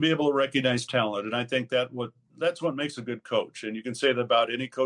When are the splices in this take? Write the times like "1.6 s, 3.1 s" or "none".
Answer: none